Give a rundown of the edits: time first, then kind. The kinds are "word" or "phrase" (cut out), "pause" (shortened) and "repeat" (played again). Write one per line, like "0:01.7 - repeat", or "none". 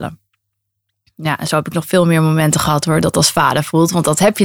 none

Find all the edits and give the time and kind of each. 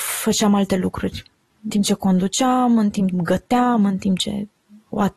0:01.7 - word
0:03.1 - word

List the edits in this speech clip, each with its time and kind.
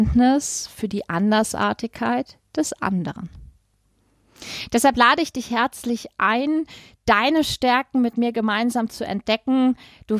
none

